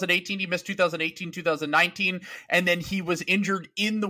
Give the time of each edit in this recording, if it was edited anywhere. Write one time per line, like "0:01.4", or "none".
none

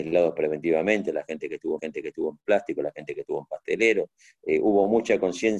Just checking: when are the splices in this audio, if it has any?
0:01.8

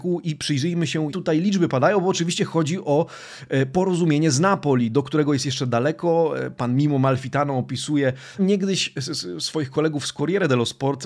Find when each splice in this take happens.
0:01.1
0:08.4

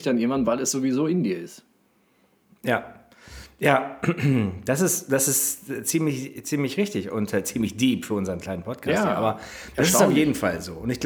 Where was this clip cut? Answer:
none

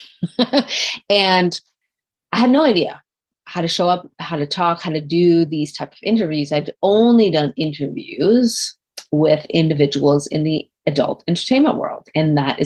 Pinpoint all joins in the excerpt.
none

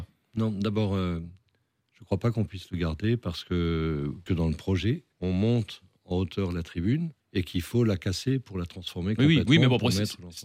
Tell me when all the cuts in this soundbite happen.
0:04.3
0:05.1
0:07.2

